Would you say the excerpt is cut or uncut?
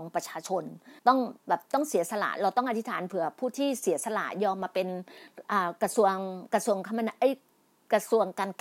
cut